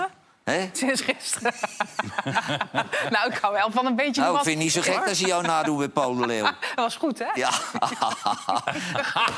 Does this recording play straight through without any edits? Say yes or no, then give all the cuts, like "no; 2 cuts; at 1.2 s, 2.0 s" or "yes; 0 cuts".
yes; 0 cuts